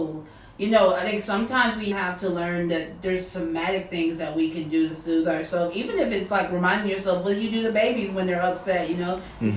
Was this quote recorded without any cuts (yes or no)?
no